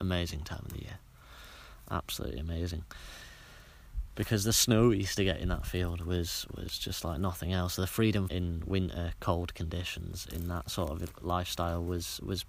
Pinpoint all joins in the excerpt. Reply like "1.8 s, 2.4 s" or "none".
8.3 s